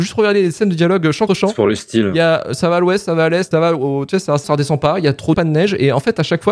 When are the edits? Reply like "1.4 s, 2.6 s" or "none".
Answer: 1.3 s, 3.5 s, 4.4 s, 5.3 s